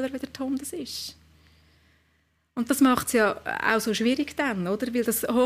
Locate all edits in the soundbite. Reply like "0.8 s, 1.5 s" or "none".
none